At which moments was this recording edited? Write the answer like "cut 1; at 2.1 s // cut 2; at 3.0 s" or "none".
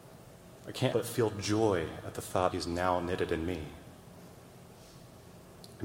cut 1; at 0.9 s // cut 2; at 2.5 s